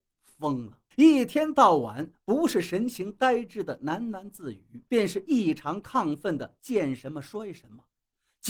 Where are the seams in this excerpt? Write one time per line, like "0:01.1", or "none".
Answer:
0:00.9
0:04.9